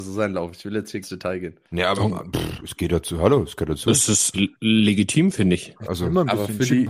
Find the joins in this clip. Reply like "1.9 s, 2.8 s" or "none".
1.0 s, 1.7 s, 4.3 s